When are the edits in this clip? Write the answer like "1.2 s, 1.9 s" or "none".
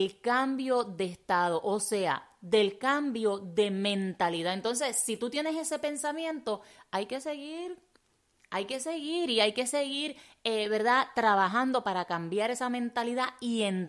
none